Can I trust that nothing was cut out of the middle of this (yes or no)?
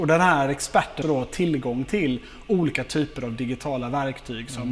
no